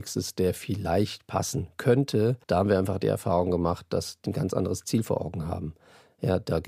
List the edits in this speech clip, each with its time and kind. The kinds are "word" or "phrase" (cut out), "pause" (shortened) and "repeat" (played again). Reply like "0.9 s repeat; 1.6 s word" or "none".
2.4 s pause; 4.3 s phrase